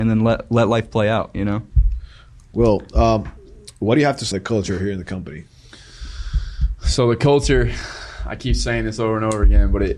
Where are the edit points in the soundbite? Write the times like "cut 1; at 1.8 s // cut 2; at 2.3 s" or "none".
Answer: cut 1; at 4.3 s